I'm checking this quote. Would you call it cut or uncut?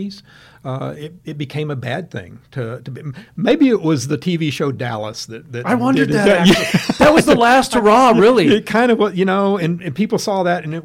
uncut